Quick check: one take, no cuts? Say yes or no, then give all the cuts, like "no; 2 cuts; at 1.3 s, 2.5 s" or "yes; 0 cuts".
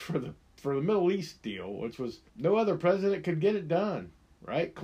no; 1 cut; at 2.3 s